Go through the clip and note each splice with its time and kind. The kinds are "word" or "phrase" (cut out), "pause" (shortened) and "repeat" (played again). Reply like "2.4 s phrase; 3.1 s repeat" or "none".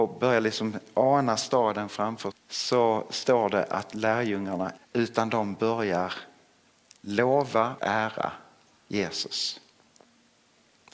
2.3 s word; 4.8 s phrase; 7.8 s word